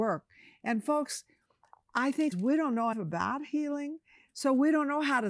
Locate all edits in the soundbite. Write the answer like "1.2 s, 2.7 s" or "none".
2.3 s, 2.9 s